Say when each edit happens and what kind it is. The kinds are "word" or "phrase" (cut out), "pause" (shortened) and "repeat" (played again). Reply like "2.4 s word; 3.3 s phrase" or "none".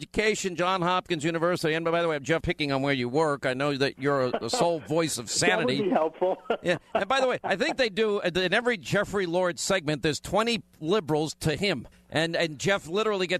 2.4 s phrase; 11.9 s pause